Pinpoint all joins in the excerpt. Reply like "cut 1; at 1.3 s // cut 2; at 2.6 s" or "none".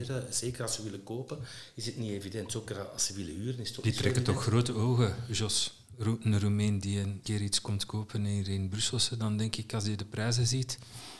cut 1; at 7.2 s